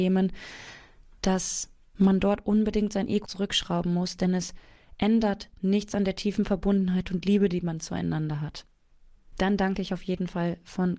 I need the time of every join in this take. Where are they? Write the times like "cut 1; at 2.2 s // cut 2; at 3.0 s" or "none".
cut 1; at 3.3 s